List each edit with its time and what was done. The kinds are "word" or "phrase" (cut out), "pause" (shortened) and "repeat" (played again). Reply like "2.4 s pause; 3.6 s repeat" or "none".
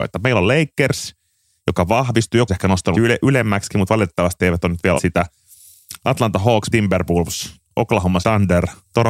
2.5 s word; 2.9 s word; 5.0 s word; 6.7 s word; 8.2 s word